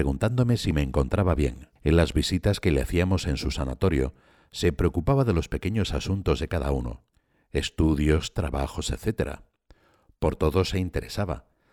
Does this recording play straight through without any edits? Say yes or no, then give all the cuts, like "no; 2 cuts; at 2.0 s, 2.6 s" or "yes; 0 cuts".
no; 1 cut; at 1.8 s